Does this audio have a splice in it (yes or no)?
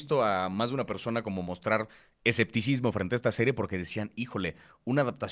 no